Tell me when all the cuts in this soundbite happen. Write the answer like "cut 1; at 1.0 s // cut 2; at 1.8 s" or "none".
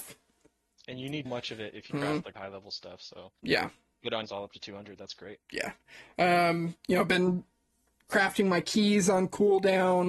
cut 1; at 1.3 s // cut 2; at 1.9 s // cut 3; at 2.4 s // cut 4; at 3.4 s // cut 5; at 4.3 s // cut 6; at 5.4 s